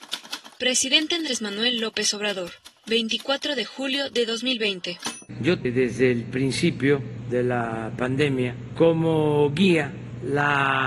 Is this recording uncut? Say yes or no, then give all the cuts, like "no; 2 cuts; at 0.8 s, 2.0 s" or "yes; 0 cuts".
no; 1 cut; at 5.6 s